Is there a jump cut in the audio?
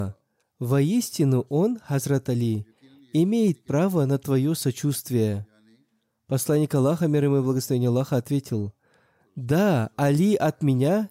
no; 0 cuts

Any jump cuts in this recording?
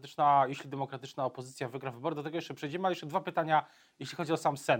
no; 0 cuts

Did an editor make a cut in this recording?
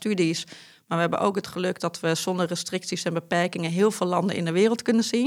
no; 0 cuts

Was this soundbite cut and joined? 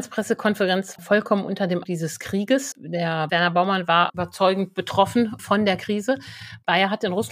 yes; 6 cuts; at 1.0 s, 1.8 s, 2.7 s, 3.3 s, 4.1 s, 5.4 s

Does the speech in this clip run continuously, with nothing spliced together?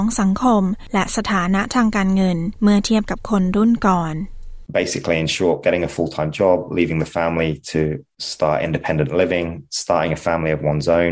yes; 0 cuts

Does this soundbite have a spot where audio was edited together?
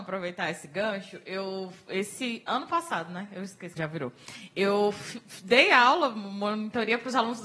yes; 1 cut; at 3.8 s

